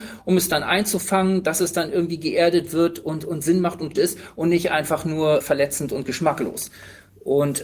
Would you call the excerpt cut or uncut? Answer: cut